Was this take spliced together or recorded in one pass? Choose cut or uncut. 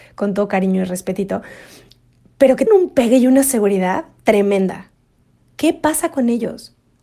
cut